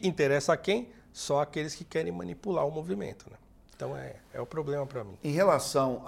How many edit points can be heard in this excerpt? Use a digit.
0